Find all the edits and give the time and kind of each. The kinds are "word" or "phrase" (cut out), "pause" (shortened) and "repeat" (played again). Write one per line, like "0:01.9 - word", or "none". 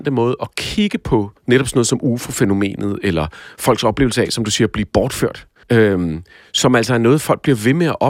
0:01.4 - pause
0:05.6 - pause